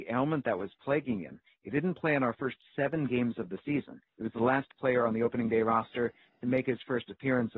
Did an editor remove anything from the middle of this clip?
no; 0 cuts

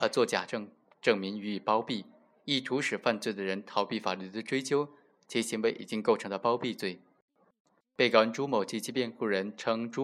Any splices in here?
no; 0 cuts

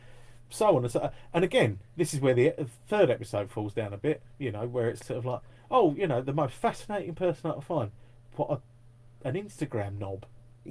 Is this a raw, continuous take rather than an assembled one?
no; 2 cuts; at 1.9 s, 5.0 s

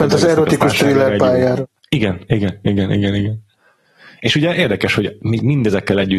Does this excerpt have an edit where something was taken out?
yes; 1 cut; at 1.8 s

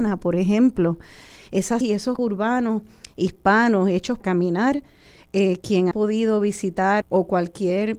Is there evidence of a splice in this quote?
yes; 5 cuts; at 1.8 s, 2.2 s, 4.2 s, 5.9 s, 7.0 s

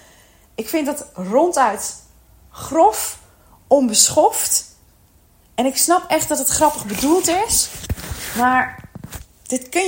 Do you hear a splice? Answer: no; 0 cuts

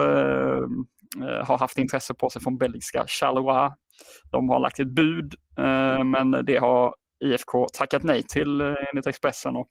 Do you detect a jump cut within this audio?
no; 0 cuts

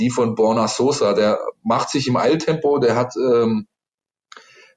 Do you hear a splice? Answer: no; 0 cuts

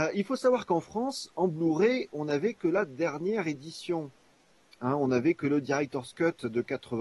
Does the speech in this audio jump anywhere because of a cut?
no; 0 cuts

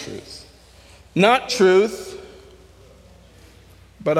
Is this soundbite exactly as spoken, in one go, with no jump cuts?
no; 1 cut; at 1.5 s

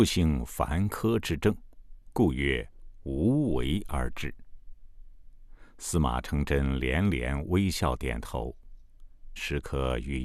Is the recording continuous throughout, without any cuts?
no; 1 cut; at 9.4 s

